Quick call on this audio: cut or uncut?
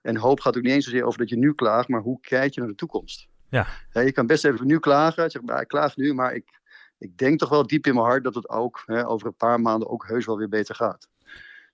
uncut